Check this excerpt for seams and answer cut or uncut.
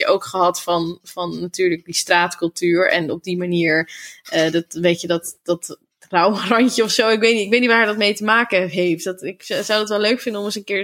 uncut